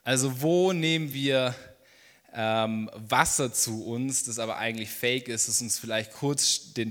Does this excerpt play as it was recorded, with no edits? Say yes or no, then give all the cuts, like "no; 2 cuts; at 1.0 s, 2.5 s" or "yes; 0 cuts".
yes; 0 cuts